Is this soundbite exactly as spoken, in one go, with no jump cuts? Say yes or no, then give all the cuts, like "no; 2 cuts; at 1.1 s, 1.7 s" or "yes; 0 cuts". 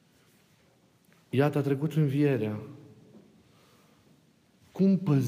yes; 0 cuts